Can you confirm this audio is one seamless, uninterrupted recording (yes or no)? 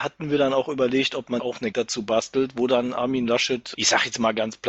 no